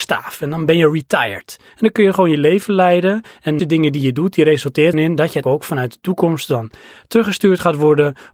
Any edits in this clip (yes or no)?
yes